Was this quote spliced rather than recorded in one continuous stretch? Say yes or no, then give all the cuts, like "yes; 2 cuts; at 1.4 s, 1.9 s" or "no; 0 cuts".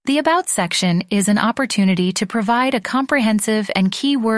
no; 0 cuts